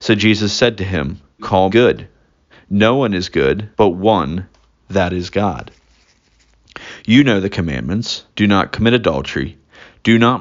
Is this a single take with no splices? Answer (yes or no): no